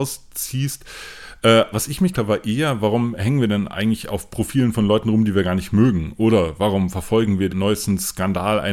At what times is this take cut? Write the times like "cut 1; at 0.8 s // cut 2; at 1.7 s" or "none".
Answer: cut 1; at 1.7 s // cut 2; at 2.1 s // cut 3; at 7.5 s